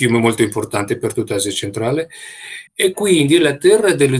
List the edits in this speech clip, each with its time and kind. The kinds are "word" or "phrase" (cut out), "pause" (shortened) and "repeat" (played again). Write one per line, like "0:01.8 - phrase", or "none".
0:02.7 - pause